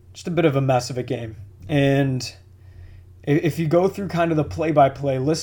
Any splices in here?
yes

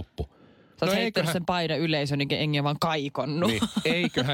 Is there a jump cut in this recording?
no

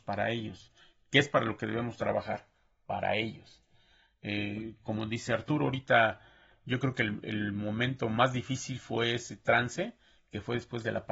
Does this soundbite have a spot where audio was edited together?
no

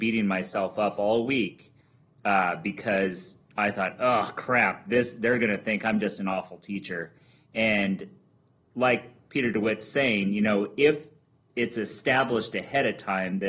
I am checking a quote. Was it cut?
no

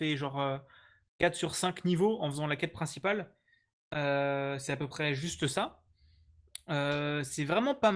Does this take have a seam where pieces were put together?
no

